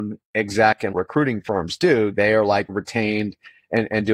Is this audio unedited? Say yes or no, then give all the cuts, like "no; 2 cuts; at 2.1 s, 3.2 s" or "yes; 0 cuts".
no; 2 cuts; at 0.9 s, 2.7 s